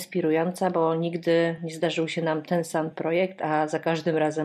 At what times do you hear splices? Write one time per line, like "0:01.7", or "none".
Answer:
none